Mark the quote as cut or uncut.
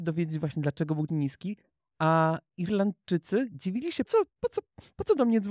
cut